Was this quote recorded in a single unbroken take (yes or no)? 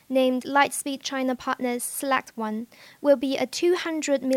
yes